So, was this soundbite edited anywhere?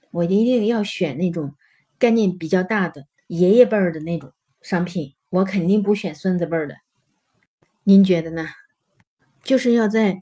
no; 0 cuts

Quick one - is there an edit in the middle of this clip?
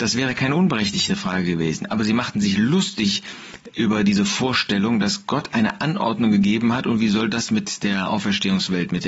no; 0 cuts

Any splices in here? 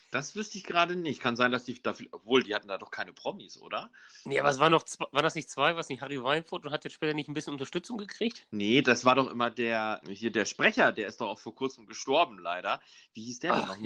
yes; 1 cut; at 10.0 s

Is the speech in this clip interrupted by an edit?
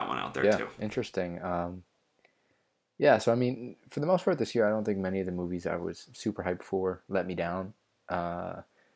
no; 0 cuts

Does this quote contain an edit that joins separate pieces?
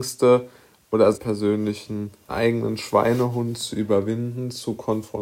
yes; 2 cuts; at 1.1 s, 2.3 s

